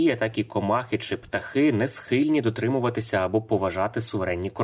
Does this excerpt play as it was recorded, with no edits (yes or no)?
yes